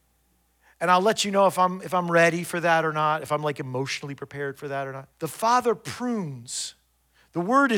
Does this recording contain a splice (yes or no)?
yes